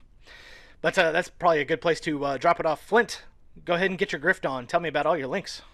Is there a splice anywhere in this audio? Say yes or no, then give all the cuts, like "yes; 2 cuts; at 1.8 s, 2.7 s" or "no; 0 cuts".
no; 0 cuts